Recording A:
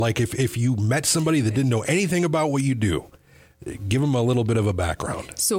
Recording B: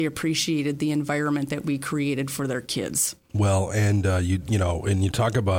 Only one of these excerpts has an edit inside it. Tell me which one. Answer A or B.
B